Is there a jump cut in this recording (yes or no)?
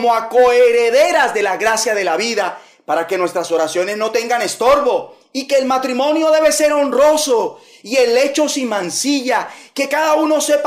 no